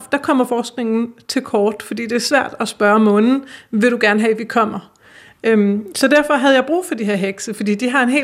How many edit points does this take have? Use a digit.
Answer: 0